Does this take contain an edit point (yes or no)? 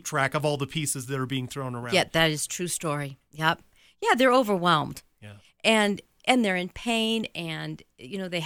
no